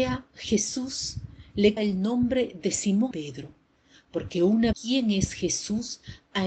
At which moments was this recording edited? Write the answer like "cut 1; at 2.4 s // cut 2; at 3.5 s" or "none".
cut 1; at 1.8 s // cut 2; at 3.1 s // cut 3; at 4.7 s